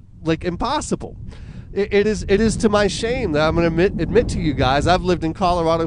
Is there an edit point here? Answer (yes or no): no